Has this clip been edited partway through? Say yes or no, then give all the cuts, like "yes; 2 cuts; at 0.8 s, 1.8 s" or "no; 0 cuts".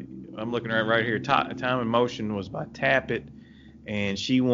no; 0 cuts